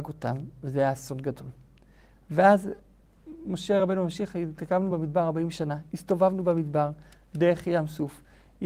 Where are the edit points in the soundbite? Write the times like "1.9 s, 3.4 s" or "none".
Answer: none